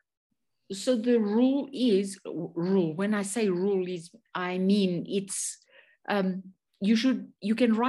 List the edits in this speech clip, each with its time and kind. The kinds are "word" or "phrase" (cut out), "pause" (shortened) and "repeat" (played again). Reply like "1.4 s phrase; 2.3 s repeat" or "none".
none